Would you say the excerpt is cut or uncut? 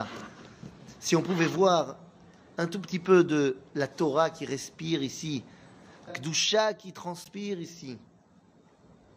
cut